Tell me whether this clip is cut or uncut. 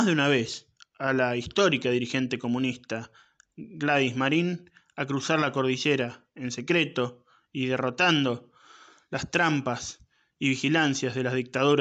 uncut